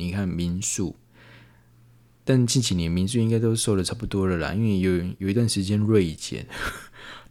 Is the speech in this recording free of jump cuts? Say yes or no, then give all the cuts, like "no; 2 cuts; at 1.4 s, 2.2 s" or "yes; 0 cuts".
yes; 0 cuts